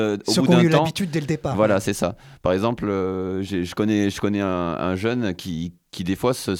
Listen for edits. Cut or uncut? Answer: uncut